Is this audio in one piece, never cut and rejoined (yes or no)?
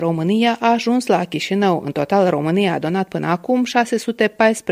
yes